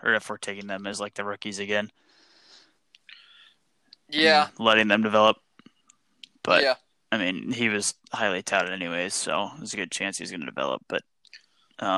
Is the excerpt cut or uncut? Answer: uncut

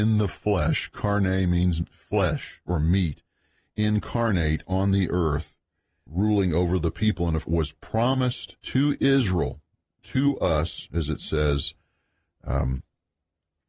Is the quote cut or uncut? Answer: cut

